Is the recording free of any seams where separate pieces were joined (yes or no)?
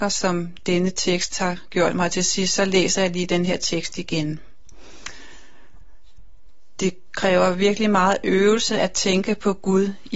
yes